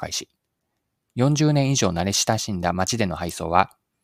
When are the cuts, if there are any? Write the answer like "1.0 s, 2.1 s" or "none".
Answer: none